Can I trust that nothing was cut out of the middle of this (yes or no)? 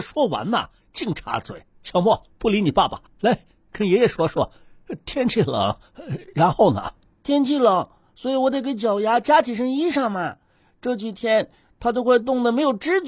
no